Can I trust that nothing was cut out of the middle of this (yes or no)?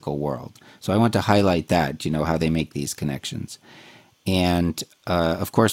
yes